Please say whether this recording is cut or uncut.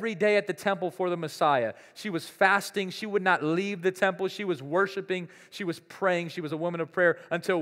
uncut